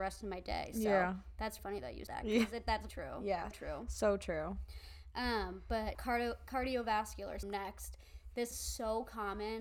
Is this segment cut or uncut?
cut